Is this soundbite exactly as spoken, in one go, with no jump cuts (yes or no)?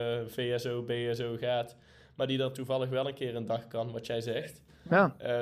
yes